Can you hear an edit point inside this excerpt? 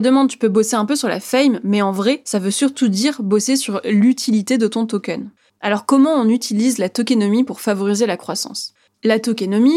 no; 0 cuts

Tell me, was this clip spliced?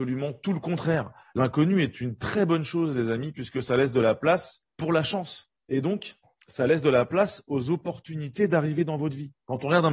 no; 0 cuts

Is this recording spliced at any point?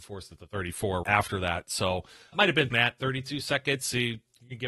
yes; 3 cuts; at 1.0 s, 2.3 s, 2.7 s

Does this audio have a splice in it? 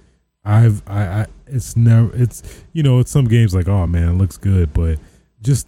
no; 0 cuts

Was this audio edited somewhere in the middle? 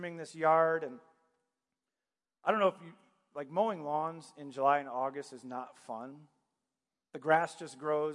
no; 0 cuts

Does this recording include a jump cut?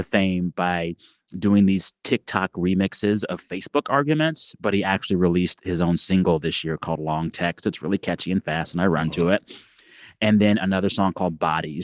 no; 0 cuts

